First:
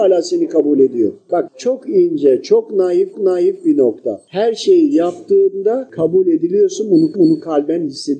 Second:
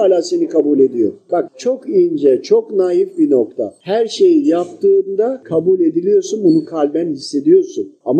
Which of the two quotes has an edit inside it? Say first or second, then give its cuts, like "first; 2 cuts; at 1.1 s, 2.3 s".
first; 2 cuts; at 3.1 s, 7.1 s